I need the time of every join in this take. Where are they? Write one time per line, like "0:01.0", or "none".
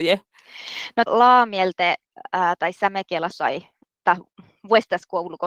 0:01.1
0:03.3

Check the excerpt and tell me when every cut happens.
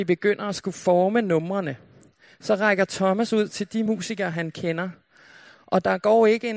none

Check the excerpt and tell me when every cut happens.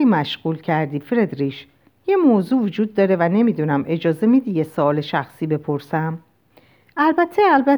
none

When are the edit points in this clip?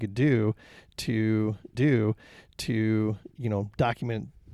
0:01.7

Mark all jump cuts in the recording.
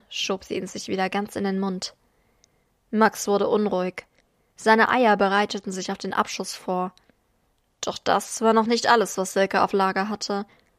none

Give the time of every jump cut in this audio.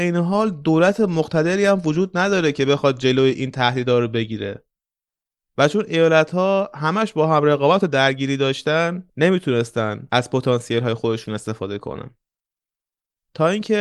none

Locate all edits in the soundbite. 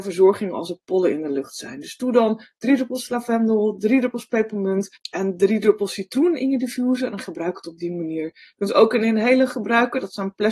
0:04.9

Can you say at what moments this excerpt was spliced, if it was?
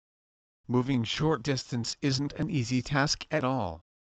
none

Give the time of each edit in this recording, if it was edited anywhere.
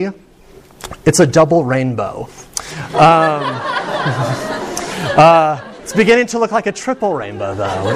none

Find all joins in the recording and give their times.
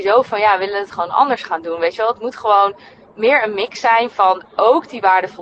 none

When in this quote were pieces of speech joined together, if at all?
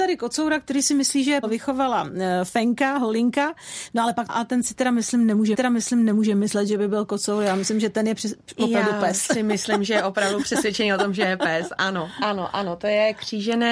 0:01.4
0:04.3
0:05.5

